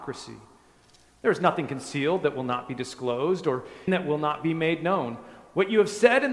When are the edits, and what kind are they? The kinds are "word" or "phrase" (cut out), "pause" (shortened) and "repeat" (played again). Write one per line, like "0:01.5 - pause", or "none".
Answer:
0:03.9 - word